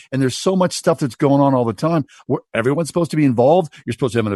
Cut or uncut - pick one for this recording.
uncut